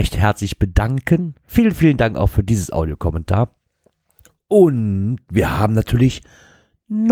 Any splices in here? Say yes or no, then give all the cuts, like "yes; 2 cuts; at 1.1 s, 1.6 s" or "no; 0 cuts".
no; 0 cuts